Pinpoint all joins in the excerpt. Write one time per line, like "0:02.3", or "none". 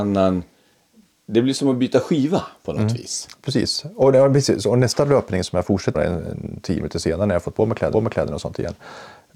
0:05.9
0:07.9

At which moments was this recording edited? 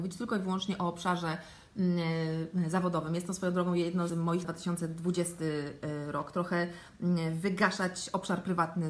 0:04.1
0:04.4

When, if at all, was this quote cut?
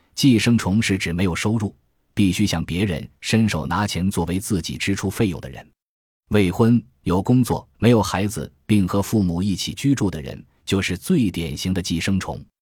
0:07.7

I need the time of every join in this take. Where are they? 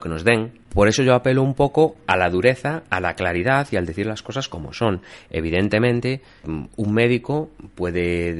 0:06.4

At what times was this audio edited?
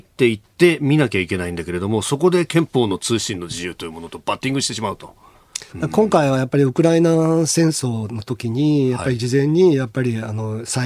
0:05.7

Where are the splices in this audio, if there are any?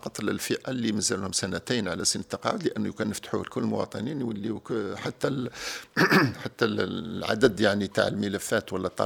none

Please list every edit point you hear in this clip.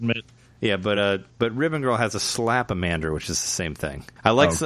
none

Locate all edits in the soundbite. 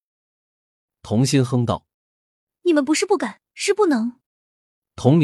0:01.9
0:03.5
0:04.3

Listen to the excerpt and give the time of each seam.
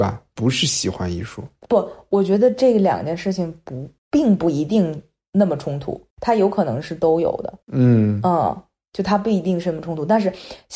0:04.0
0:06.1
0:07.6

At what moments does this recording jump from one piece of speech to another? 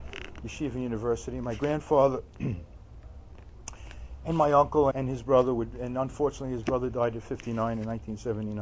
0:04.9

